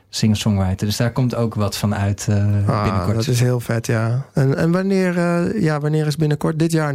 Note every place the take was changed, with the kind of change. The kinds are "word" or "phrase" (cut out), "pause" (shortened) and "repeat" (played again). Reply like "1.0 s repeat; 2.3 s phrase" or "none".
none